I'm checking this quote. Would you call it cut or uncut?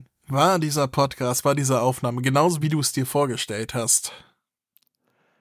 cut